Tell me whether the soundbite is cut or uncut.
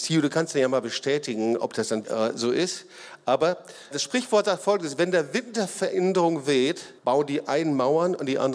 cut